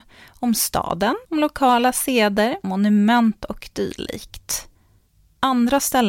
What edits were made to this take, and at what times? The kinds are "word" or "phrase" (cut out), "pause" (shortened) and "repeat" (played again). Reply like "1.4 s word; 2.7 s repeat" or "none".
1.2 s pause; 2.6 s word